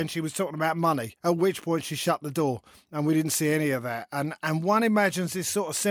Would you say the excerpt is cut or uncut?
uncut